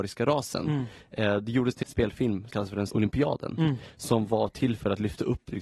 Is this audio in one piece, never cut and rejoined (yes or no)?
no